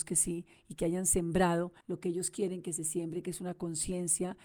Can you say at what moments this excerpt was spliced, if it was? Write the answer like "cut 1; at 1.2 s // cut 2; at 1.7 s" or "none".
cut 1; at 1.8 s